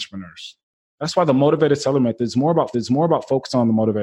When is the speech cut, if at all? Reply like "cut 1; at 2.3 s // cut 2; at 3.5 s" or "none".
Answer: cut 1; at 2.7 s

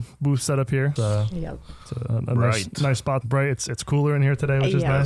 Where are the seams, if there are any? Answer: cut 1; at 1.0 s // cut 2; at 3.2 s

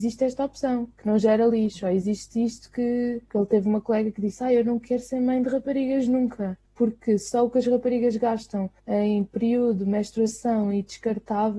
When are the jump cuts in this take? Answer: cut 1; at 0.9 s // cut 2; at 3.3 s // cut 3; at 6.7 s // cut 4; at 8.8 s

